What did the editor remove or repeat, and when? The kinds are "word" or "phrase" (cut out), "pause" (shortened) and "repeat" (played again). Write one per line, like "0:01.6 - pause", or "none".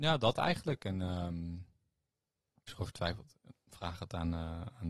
0:02.7 - word
0:03.7 - word